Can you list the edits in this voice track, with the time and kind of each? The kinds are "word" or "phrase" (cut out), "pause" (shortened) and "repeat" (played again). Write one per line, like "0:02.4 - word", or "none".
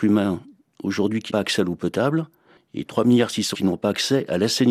0:01.3 - word
0:03.5 - word